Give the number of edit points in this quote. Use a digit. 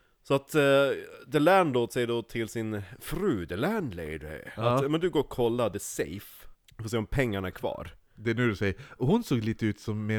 1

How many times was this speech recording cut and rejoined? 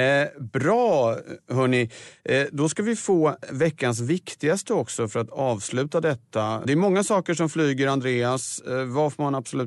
0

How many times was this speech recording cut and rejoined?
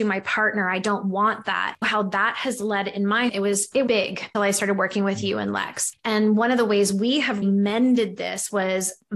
5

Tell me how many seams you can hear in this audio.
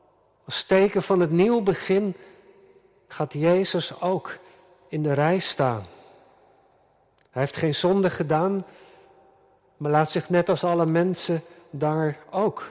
0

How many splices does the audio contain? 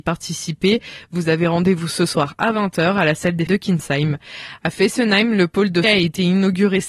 2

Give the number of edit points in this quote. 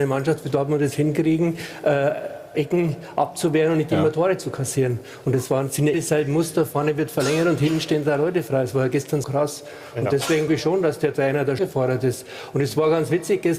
5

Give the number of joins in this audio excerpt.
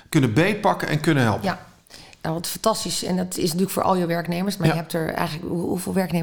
0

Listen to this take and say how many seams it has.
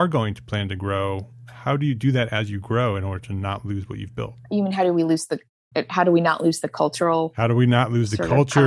1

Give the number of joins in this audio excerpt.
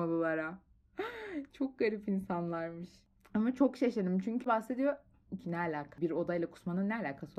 2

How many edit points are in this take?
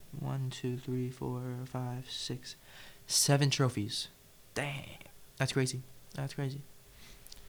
1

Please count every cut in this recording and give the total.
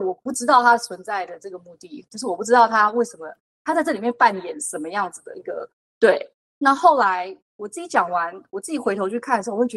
1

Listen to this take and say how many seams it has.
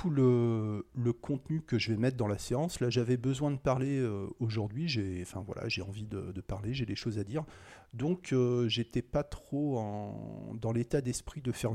0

